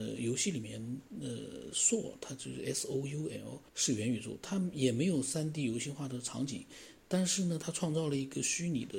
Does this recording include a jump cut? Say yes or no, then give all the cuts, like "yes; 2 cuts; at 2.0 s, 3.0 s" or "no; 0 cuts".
yes; 1 cut; at 3.7 s